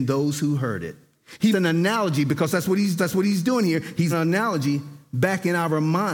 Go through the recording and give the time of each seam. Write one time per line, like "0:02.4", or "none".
0:01.5
0:03.0
0:04.1

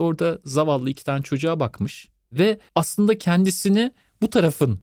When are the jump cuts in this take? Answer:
0:02.7

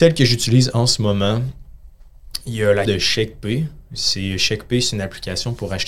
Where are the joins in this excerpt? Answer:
0:02.9

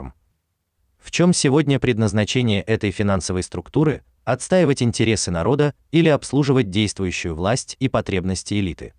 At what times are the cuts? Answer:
none

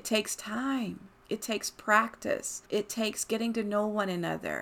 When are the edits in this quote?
0:01.1
0:02.7

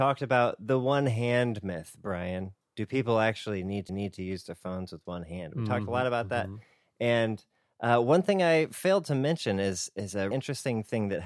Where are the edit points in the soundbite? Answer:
0:03.9
0:10.3

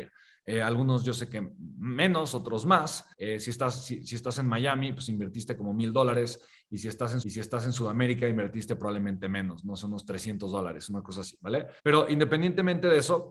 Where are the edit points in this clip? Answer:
0:03.1
0:07.2
0:11.8

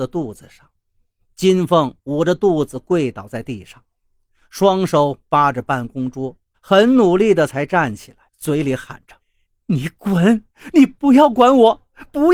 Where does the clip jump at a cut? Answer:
0:06.5
0:08.3
0:09.2

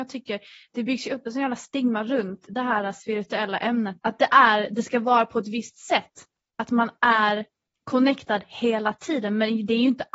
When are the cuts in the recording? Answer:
0:04.0

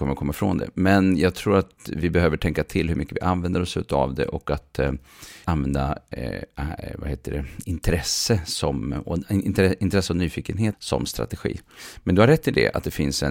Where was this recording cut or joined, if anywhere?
0:05.4
0:10.7

